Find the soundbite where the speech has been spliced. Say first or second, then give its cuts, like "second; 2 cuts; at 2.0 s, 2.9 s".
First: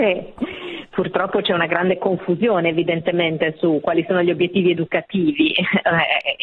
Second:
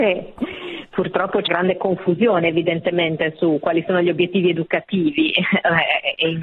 second; 1 cut; at 1.5 s